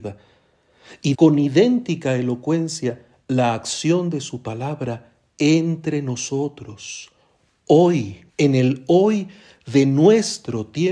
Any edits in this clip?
yes; 2 cuts; at 1.1 s, 8.3 s

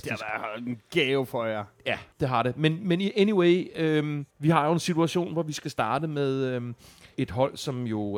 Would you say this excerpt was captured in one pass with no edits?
no; 3 cuts; at 2.1 s, 4.3 s, 7.1 s

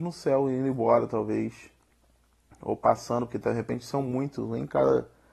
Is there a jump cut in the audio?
no; 0 cuts

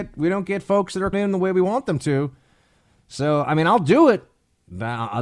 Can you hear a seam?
yes; 1 cut; at 1.1 s

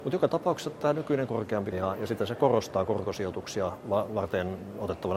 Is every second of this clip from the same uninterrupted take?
no; 2 cuts; at 1.3 s, 1.7 s

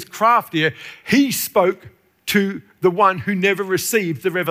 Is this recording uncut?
yes; 0 cuts

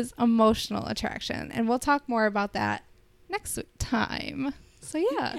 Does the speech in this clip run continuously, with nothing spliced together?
yes; 0 cuts

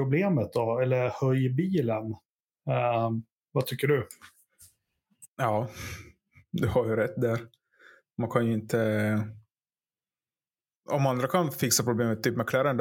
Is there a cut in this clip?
no; 0 cuts

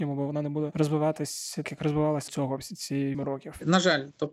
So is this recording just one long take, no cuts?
no; 3 cuts; at 1.6 s, 2.3 s, 3.1 s

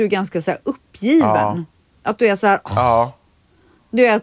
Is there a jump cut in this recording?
no; 0 cuts

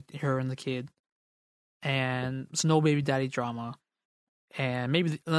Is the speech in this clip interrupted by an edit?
no; 0 cuts

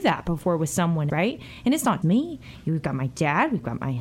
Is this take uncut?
no; 2 cuts; at 1.1 s, 2.0 s

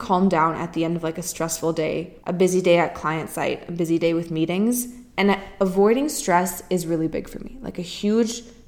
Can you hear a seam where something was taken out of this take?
yes; 1 cut; at 2.2 s

